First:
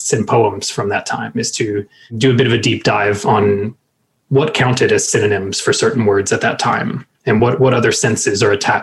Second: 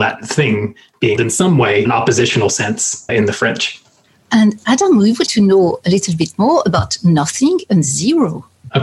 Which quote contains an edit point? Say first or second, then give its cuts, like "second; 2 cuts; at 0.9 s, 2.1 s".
second; 4 cuts; at 1.2 s, 1.8 s, 3.1 s, 5.3 s